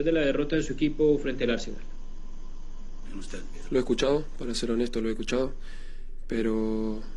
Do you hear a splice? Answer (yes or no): no